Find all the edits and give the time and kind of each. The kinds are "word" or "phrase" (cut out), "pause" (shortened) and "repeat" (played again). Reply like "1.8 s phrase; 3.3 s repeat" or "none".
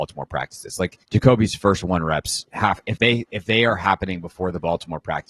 1.0 s pause